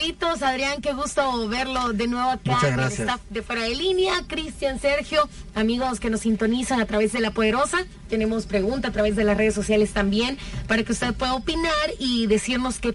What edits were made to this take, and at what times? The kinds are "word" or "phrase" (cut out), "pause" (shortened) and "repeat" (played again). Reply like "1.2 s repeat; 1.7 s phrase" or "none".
none

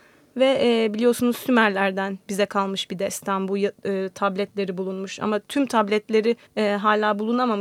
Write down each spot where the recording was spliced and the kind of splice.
6.5 s pause

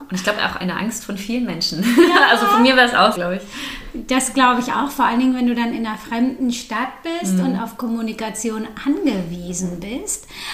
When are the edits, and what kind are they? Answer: 3.1 s word

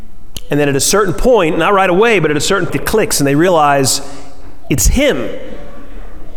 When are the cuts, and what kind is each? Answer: 2.7 s word

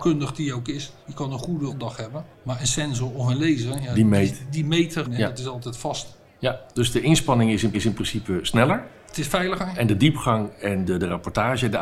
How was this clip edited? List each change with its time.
1.0 s pause; 1.7 s phrase; 2.3 s pause; 5.0 s word; 7.7 s repeat; 10.9 s word

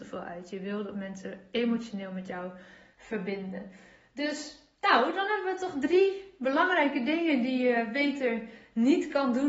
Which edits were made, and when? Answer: none

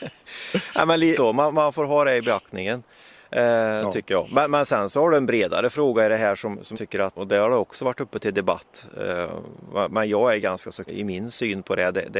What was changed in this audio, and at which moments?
1.1 s word; 6.7 s word; 7.2 s word; 10.9 s word

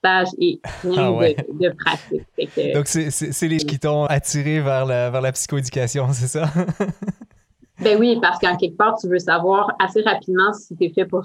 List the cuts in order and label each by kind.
3.6 s word; 4.1 s word

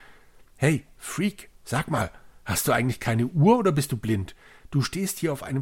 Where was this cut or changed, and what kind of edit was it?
1.5 s pause

